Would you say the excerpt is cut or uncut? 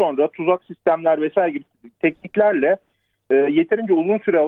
uncut